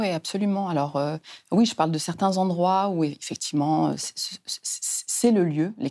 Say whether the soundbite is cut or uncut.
uncut